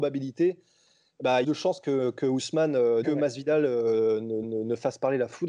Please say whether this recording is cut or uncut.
cut